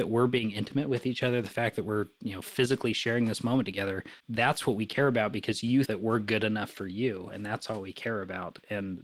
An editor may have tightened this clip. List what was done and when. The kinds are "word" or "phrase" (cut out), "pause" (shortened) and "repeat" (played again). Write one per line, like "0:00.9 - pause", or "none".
0:04.2 - pause
0:05.9 - word